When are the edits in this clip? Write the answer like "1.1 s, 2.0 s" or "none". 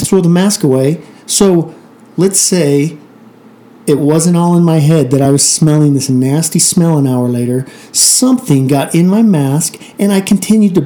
none